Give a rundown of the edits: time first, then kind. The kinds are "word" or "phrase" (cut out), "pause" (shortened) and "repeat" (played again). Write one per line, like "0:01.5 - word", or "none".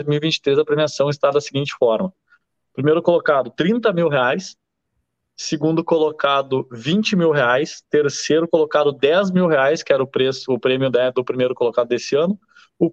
none

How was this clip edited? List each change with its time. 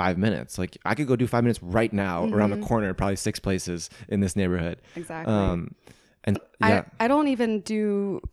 0:06.3 - word

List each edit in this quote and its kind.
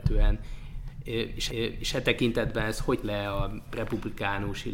0:01.5 - repeat
0:03.0 - word

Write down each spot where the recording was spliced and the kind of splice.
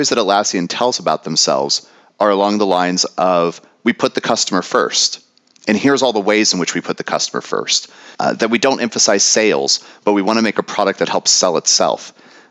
0:08.1 - pause

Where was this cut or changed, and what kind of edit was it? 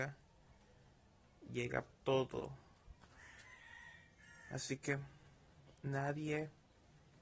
0:01.9 - word

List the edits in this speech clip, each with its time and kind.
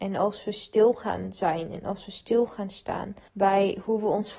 0:03.3 - pause

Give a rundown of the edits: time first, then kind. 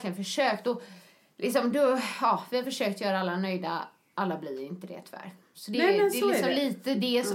none

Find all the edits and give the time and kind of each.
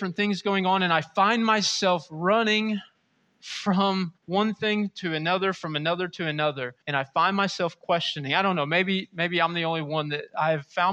0:04.2 - pause
0:06.8 - pause

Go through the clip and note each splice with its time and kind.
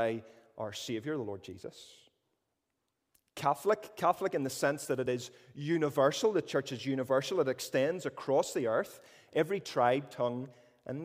none

